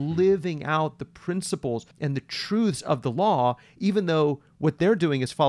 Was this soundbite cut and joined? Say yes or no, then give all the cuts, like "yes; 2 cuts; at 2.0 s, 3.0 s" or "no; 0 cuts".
yes; 1 cut; at 1.9 s